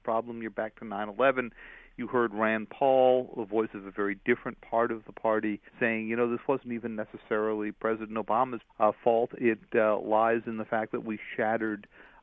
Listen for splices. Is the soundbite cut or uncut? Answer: cut